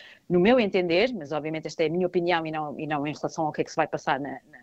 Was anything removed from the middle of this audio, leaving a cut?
no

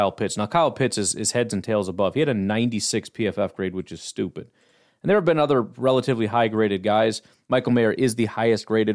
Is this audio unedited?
yes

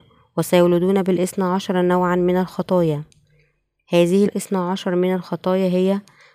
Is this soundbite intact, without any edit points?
no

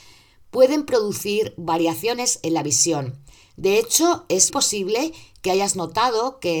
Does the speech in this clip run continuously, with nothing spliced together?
no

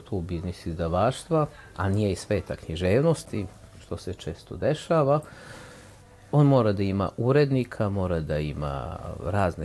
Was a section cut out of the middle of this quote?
no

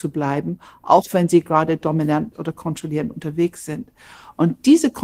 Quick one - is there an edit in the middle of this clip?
no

